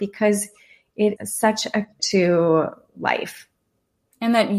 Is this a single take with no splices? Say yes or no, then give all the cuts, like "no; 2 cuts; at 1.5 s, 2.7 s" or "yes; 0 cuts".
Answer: no; 2 cuts; at 1.2 s, 2.0 s